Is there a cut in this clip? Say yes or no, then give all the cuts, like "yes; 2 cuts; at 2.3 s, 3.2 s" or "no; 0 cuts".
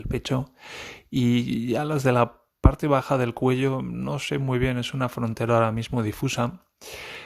no; 0 cuts